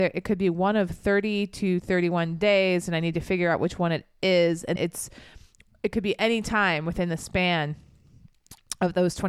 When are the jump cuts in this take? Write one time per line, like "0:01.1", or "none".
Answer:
0:04.8